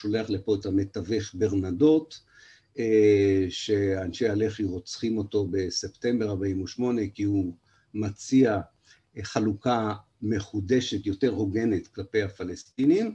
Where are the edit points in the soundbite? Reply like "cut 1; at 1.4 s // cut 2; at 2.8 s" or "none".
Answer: none